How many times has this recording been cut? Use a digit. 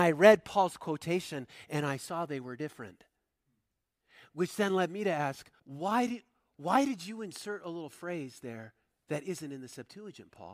1